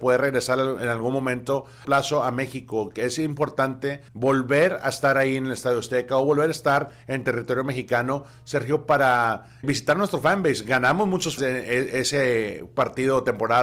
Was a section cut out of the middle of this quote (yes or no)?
yes